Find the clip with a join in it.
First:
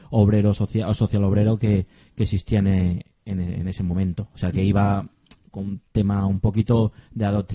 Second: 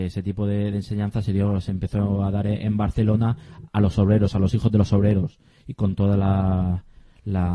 second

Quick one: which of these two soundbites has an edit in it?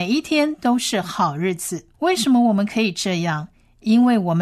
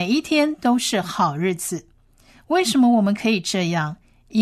first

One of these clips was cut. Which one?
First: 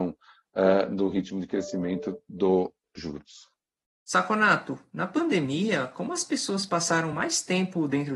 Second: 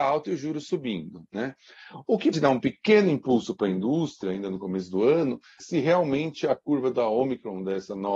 second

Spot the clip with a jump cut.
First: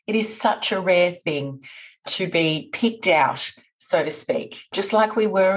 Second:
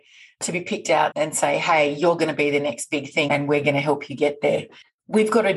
second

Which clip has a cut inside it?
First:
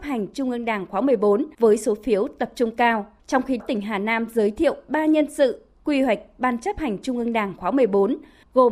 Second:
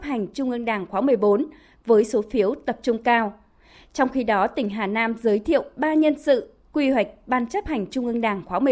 first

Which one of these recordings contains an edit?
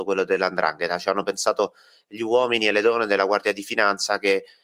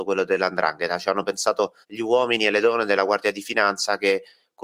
second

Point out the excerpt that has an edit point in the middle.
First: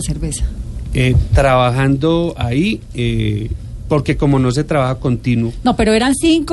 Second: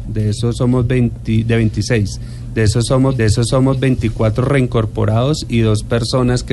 second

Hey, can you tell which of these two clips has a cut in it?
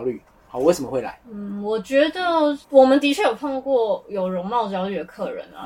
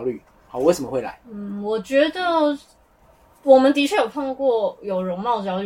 first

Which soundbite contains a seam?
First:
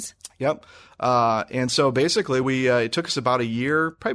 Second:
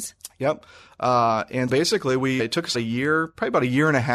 second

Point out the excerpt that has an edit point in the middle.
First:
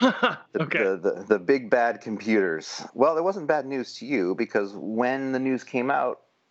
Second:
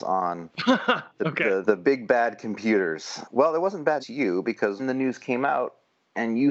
second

